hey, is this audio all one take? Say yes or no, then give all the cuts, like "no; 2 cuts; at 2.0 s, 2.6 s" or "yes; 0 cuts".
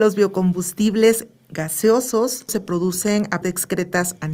no; 2 cuts; at 2.5 s, 3.4 s